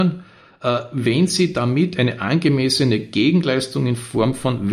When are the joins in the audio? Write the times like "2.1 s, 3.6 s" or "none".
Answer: none